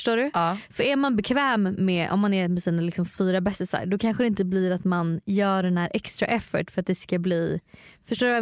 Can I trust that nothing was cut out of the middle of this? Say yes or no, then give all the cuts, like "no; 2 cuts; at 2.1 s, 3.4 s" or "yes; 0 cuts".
yes; 0 cuts